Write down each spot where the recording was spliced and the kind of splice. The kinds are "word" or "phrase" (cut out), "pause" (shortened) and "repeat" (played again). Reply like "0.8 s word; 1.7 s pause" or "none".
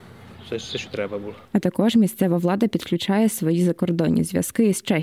1.4 s pause